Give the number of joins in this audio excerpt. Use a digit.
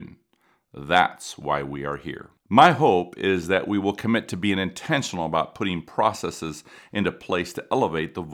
1